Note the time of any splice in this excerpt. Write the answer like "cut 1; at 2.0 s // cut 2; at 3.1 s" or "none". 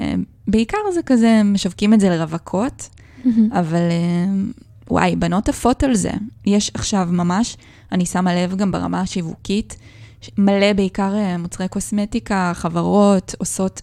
none

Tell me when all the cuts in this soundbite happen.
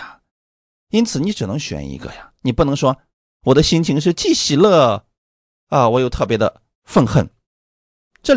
none

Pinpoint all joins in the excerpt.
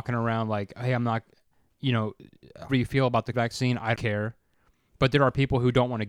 cut 1; at 2.7 s // cut 2; at 3.3 s // cut 3; at 3.9 s

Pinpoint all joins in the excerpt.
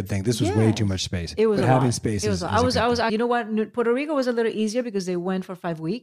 cut 1; at 3.1 s

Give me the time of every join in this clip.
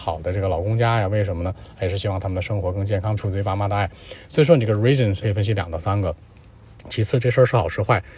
cut 1; at 3.2 s // cut 2; at 5.2 s

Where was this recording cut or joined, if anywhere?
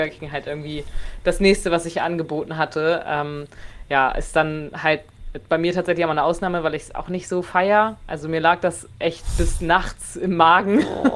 none

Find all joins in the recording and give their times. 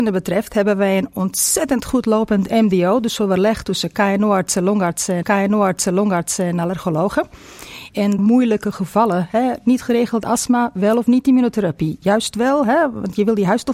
cut 1; at 5.2 s // cut 2; at 8.2 s

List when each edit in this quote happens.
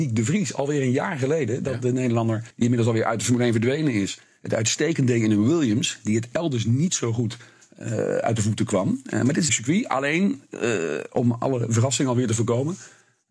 cut 1; at 2.5 s // cut 2; at 9.5 s

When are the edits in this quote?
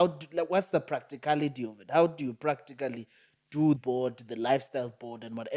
cut 1; at 3.8 s

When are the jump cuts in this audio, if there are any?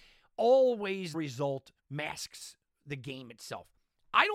cut 1; at 1.1 s // cut 2; at 1.8 s

